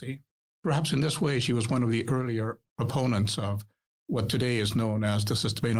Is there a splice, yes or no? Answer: no